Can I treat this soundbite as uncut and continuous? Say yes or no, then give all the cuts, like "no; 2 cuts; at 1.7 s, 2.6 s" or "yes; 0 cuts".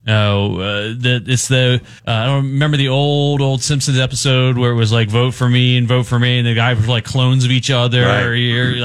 no; 1 cut; at 2.0 s